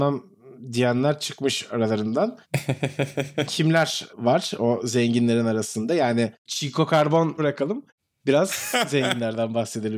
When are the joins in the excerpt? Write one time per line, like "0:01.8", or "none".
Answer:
0:03.5
0:04.1
0:06.4
0:07.4
0:08.7